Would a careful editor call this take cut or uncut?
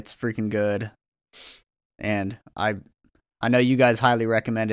uncut